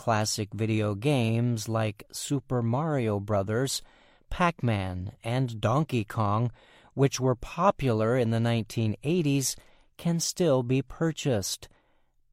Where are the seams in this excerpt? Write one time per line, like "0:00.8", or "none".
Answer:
none